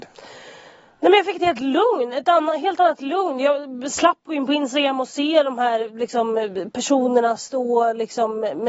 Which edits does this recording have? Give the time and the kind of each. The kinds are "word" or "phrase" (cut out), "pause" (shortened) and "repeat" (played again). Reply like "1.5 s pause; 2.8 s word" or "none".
none

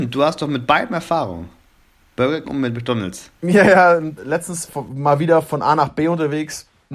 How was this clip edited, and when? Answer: 2.4 s word; 4.2 s phrase; 4.7 s phrase

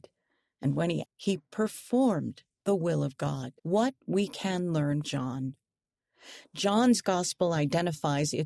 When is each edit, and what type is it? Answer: 1.0 s word; 3.6 s pause; 5.0 s word

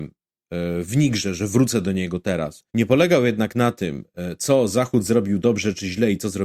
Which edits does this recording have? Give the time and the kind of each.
2.7 s pause

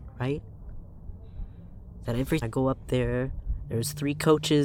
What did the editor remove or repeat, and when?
2.4 s word

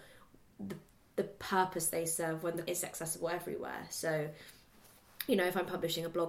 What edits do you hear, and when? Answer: 2.7 s word

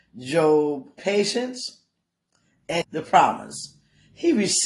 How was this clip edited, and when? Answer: 1.0 s word; 2.8 s phrase

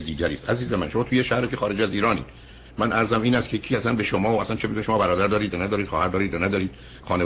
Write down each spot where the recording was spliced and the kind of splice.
1.5 s word

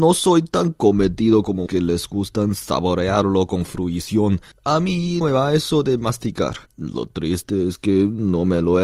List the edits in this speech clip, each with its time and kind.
1.7 s word; 4.5 s pause; 5.2 s word; 6.7 s pause

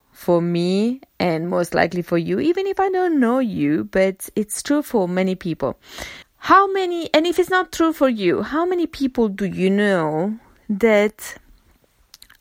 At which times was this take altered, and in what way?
6.2 s pause

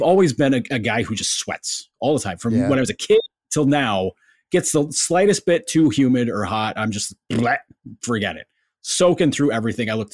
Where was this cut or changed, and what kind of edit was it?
none

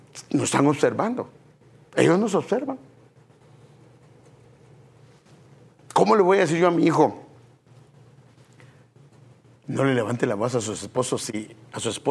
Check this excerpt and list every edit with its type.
none

